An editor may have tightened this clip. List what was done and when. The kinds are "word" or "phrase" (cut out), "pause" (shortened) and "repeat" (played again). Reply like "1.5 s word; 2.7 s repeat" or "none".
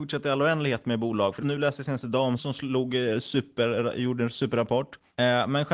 1.4 s phrase; 2.4 s word

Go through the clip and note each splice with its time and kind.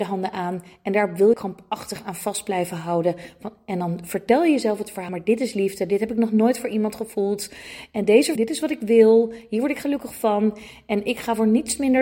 1.3 s word; 5.1 s word; 8.4 s word

